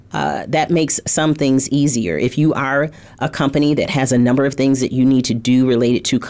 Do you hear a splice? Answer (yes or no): no